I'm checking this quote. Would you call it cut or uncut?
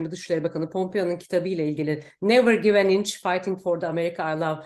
uncut